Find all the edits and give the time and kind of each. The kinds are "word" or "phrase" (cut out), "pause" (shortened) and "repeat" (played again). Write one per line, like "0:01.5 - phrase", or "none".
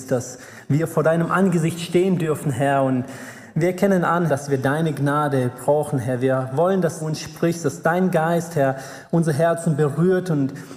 0:04.3 - word
0:07.0 - phrase